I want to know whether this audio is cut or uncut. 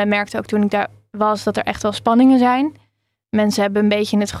uncut